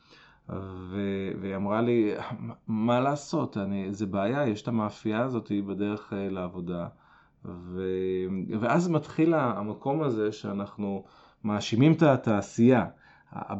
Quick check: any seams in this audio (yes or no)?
no